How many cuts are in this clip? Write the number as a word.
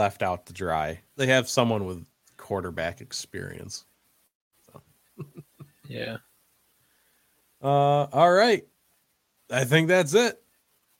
one